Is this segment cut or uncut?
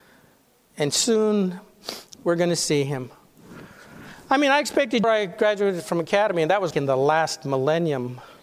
cut